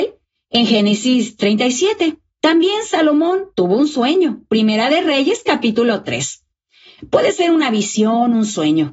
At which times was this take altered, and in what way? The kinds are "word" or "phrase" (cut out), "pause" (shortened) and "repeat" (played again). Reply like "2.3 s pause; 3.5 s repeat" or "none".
3.5 s pause

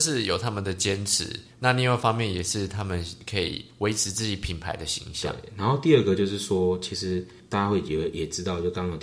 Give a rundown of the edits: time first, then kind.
1.5 s pause

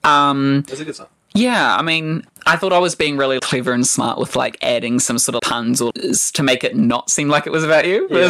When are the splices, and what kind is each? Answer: 2.3 s word; 3.4 s word; 5.4 s word; 5.9 s word

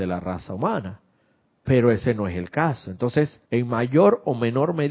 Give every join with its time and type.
1.5 s pause; 3.4 s pause

